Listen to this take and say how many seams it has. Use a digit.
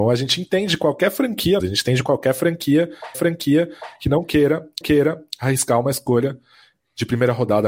3